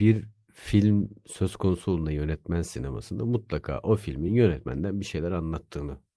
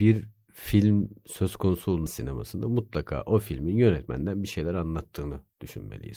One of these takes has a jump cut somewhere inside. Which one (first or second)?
second